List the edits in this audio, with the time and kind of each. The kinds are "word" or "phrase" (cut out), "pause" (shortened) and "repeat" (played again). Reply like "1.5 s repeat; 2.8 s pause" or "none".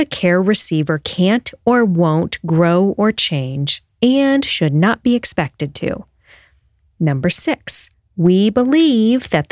7.9 s pause